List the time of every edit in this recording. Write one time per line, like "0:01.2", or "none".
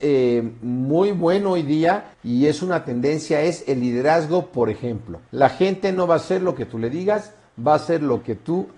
0:02.1
0:05.3